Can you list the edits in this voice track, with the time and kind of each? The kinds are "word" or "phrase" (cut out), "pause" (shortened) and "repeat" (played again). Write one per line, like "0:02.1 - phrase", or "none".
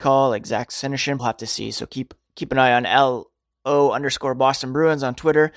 0:01.2 - phrase